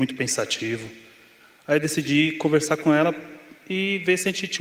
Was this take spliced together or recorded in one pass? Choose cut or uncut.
uncut